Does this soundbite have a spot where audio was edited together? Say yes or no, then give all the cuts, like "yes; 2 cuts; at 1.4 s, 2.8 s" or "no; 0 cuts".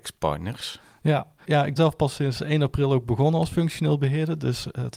yes; 2 cuts; at 1.4 s, 1.8 s